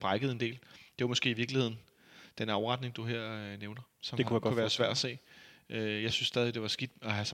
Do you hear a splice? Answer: no; 0 cuts

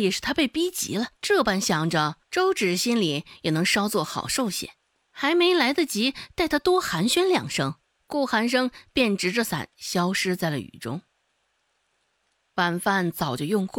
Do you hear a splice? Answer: yes; 4 cuts; at 1.2 s, 2.2 s, 4.9 s, 7.9 s

